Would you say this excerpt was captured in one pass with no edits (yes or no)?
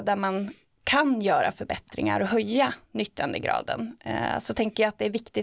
yes